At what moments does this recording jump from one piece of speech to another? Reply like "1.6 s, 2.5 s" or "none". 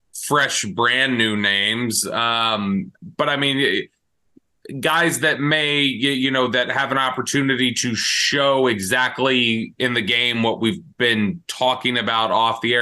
none